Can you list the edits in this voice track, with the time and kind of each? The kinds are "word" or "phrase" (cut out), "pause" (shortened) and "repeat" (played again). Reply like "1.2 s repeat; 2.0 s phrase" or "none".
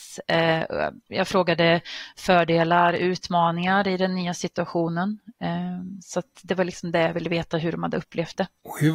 none